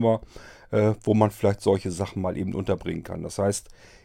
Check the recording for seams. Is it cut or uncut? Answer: uncut